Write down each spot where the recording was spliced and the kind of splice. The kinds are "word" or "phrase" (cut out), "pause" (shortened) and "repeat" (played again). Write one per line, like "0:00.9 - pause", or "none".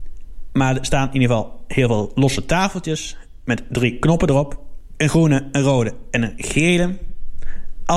none